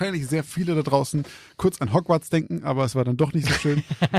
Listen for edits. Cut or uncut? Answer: uncut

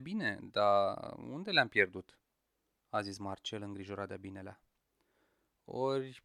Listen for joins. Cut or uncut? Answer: uncut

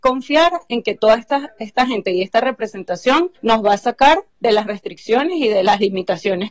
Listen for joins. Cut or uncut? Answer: cut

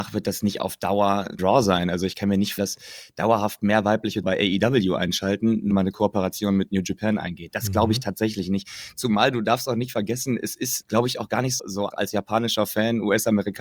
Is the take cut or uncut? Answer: cut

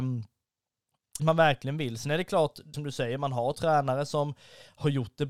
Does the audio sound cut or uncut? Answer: cut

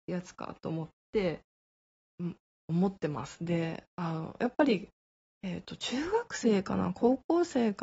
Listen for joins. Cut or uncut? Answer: uncut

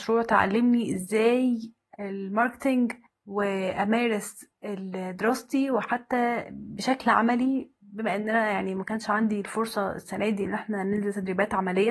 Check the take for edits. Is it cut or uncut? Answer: cut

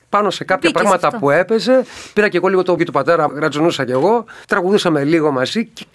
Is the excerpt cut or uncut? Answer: cut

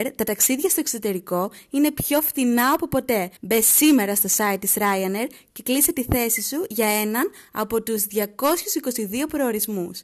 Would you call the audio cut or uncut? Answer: cut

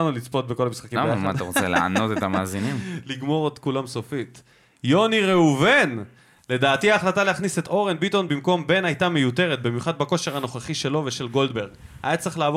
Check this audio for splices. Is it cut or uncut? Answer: uncut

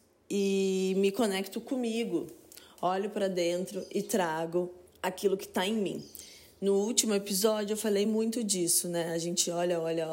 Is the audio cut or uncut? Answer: uncut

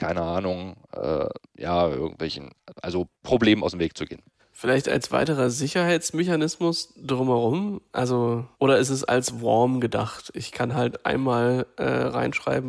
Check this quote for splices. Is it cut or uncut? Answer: cut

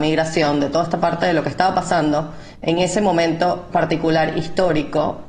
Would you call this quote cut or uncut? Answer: uncut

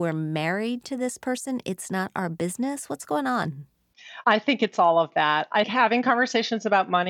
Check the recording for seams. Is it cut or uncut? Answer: cut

